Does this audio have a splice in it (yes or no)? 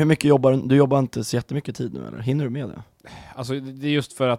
no